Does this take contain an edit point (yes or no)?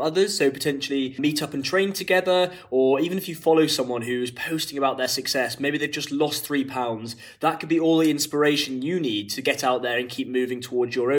no